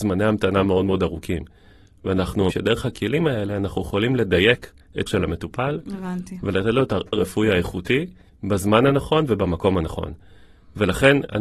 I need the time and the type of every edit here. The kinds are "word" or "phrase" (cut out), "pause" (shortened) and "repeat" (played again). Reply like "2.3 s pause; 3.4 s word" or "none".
2.5 s word; 5.1 s word; 7.1 s phrase; 8.3 s pause